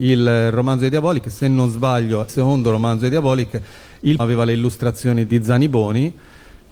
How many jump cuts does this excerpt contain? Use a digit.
3